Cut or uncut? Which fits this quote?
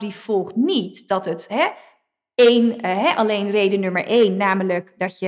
uncut